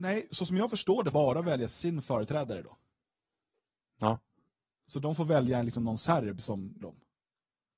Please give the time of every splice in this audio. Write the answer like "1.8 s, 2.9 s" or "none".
1.1 s, 6.8 s